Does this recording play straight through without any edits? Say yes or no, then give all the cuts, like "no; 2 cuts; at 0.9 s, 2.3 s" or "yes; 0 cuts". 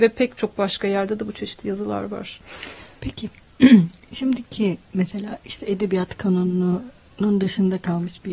yes; 0 cuts